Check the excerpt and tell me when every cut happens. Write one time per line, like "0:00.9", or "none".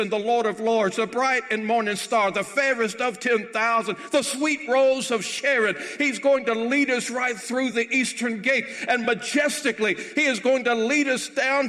none